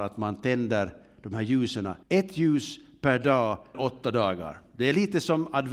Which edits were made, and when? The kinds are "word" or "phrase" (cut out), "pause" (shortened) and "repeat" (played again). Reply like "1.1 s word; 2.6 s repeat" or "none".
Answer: 2.0 s pause; 3.7 s word